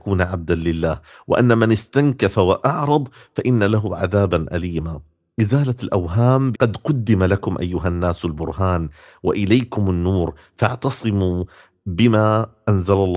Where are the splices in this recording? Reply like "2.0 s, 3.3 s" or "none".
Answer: 6.5 s